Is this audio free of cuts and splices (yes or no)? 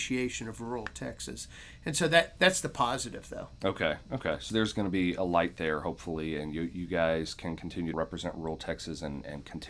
no